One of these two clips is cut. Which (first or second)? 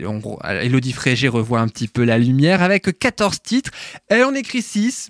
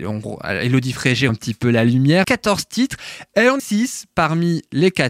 second